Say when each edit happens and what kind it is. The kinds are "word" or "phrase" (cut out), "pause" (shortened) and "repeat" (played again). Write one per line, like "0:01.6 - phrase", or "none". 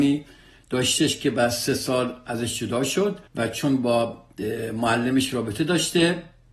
0:03.3 - pause